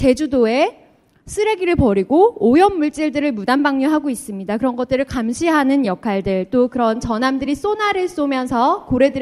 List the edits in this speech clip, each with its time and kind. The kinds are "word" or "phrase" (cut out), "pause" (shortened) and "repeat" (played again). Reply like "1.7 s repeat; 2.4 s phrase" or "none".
none